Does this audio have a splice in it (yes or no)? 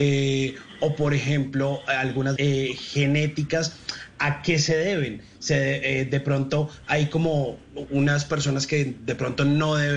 yes